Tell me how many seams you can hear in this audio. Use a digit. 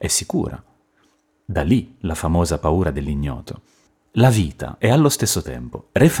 1